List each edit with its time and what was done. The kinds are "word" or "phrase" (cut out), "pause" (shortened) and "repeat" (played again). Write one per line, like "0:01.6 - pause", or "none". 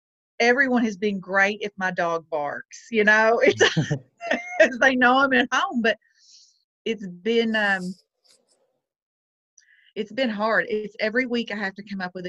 none